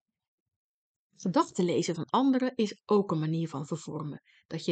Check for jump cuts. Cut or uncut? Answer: uncut